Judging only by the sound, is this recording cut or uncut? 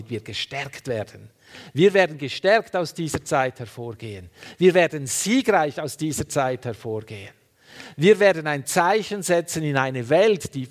uncut